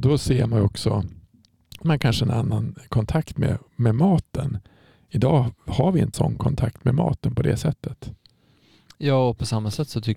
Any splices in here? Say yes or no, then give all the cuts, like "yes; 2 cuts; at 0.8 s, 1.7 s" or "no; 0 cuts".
yes; 2 cuts; at 1.8 s, 6.1 s